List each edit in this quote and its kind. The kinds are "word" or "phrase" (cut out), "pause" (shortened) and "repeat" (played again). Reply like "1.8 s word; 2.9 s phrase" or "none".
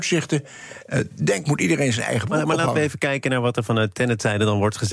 1.4 s word

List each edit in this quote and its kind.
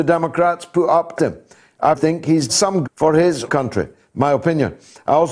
1.2 s word; 1.9 s word; 2.5 s word; 2.8 s word; 3.5 s word

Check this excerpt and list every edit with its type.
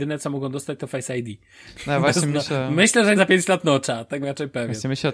3.2 s phrase; 4.2 s word

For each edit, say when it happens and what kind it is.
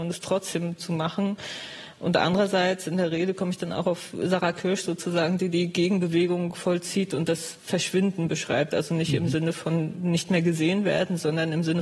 none

